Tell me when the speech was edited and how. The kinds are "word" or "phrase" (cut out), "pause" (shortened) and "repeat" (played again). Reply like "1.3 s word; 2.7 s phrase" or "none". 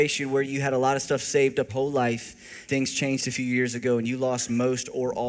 1.7 s word; 2.7 s word